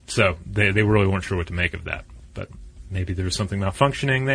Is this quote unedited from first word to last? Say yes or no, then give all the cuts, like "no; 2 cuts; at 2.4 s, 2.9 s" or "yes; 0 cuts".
yes; 0 cuts